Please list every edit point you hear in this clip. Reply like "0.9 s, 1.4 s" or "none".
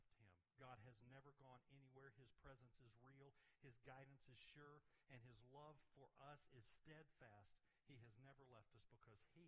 none